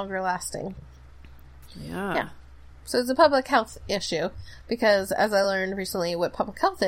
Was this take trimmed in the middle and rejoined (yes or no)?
no